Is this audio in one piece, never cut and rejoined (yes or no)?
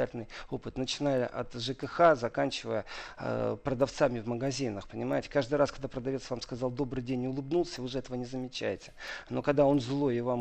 yes